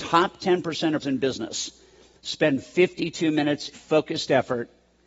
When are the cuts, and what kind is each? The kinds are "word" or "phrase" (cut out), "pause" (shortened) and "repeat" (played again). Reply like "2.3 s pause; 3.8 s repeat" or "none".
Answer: 1.0 s word; 3.7 s word

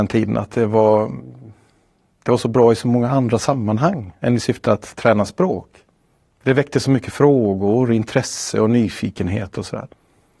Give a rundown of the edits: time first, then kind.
none

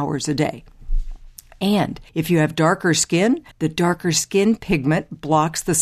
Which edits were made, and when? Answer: 2.1 s pause; 3.5 s pause

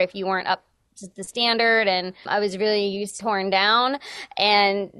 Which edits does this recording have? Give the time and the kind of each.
2.3 s word; 3.2 s word

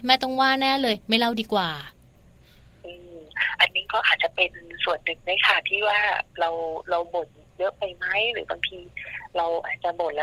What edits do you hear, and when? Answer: none

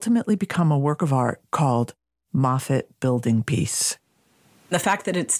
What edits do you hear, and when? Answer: none

